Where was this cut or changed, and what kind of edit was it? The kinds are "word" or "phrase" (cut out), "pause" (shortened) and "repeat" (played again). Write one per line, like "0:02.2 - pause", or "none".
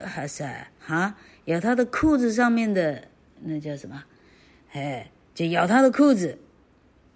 none